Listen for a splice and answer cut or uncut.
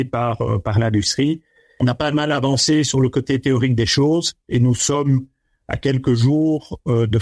uncut